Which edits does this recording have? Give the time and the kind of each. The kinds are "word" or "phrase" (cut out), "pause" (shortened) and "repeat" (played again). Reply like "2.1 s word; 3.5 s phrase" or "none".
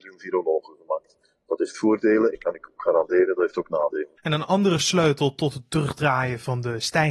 4.2 s pause